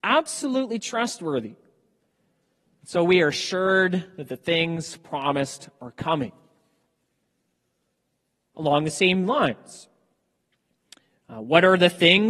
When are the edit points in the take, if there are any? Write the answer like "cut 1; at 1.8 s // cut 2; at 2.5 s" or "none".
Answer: none

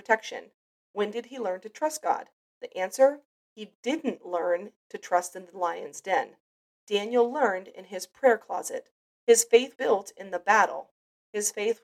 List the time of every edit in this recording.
cut 1; at 9.8 s

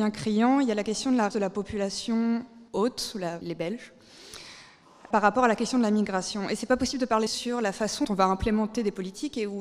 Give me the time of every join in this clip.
cut 1; at 1.3 s // cut 2; at 2.7 s // cut 3; at 3.4 s // cut 4; at 5.1 s // cut 5; at 7.3 s // cut 6; at 8.0 s

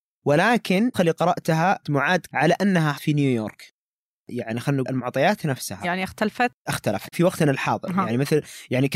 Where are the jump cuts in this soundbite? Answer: cut 1; at 0.9 s // cut 2; at 1.8 s // cut 3; at 2.3 s // cut 4; at 2.9 s // cut 5; at 4.1 s // cut 6; at 4.8 s // cut 7; at 5.8 s // cut 8; at 6.7 s // cut 9; at 7.1 s

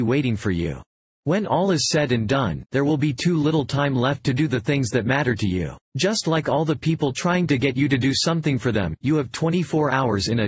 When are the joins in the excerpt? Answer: cut 1; at 0.9 s // cut 2; at 5.8 s

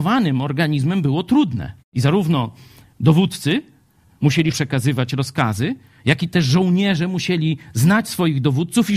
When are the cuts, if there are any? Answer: cut 1; at 1.8 s // cut 2; at 4.5 s

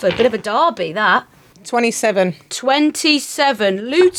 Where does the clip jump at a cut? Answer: none

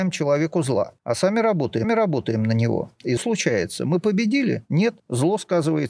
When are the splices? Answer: cut 1; at 1.0 s // cut 2; at 1.8 s // cut 3; at 3.2 s // cut 4; at 5.0 s

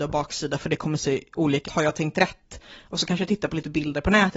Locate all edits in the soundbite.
cut 1; at 1.7 s

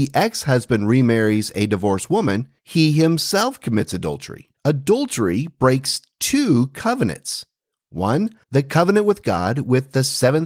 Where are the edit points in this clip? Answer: cut 1; at 2.6 s // cut 2; at 4.5 s // cut 3; at 8.4 s

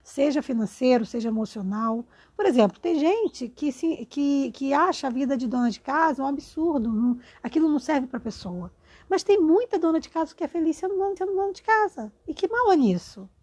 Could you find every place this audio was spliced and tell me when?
cut 1; at 11.2 s

